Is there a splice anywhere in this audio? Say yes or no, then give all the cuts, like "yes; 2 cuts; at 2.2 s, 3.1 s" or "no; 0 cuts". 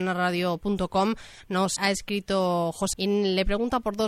yes; 2 cuts; at 1.8 s, 2.9 s